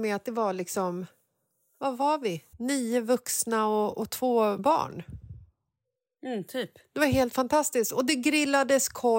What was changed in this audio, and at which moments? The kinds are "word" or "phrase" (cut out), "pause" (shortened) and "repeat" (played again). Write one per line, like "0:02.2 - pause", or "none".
0:02.5 - pause
0:04.6 - word